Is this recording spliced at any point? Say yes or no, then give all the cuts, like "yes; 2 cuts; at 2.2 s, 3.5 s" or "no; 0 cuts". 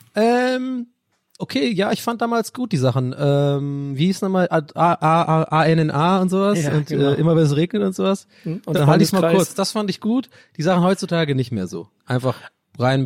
yes; 2 cuts; at 1.4 s, 8.8 s